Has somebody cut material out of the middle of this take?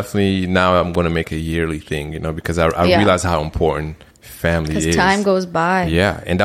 yes; 2 cuts; at 1.2 s, 4.1 s

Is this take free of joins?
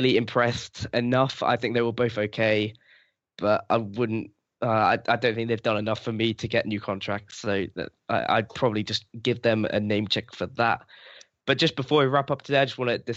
yes; 0 cuts

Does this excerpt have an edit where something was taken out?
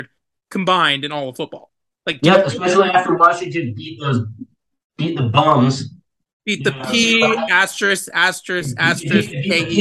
no; 0 cuts

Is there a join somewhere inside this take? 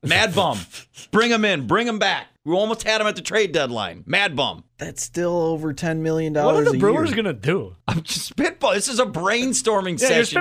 yes; 3 cuts; at 2.4 s, 4.7 s, 7.8 s

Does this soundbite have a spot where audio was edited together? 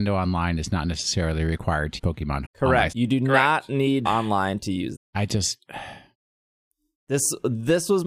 yes; 5 cuts; at 2.0 s, 2.4 s, 2.9 s, 4.0 s, 4.9 s

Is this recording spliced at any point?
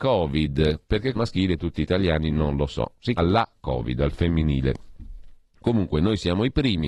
yes; 3 cuts; at 1.1 s, 1.7 s, 3.2 s

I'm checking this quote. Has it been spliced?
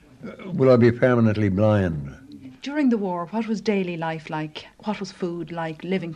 no; 0 cuts

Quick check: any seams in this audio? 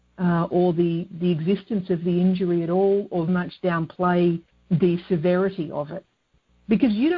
yes; 2 cuts; at 3.3 s, 4.5 s

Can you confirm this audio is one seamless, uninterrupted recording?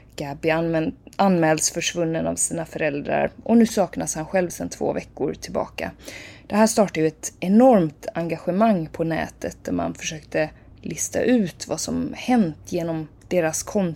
yes; 0 cuts

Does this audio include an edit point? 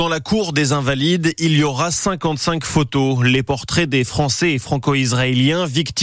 no; 0 cuts

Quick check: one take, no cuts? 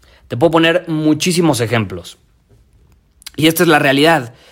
yes; 0 cuts

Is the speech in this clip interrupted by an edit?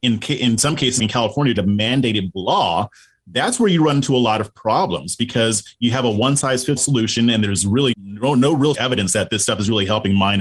yes; 6 cuts; at 1.0 s, 1.6 s, 2.3 s, 6.8 s, 7.9 s, 8.7 s

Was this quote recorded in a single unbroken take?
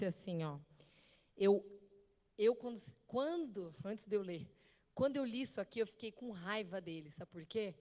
yes; 0 cuts

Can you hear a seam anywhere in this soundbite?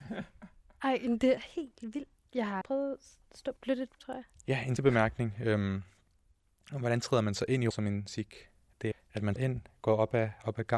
yes; 9 cuts; at 1.4 s, 2.6 s, 3.6 s, 4.0 s, 4.8 s, 7.7 s, 8.1 s, 8.9 s, 9.4 s

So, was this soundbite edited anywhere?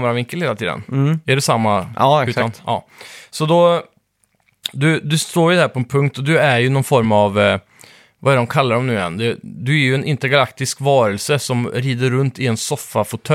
no; 0 cuts

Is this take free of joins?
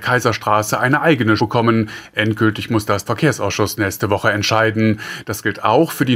no; 2 cuts; at 1.4 s, 3.0 s

